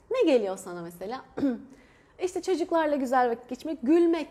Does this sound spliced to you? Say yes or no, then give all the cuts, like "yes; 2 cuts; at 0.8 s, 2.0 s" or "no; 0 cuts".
no; 0 cuts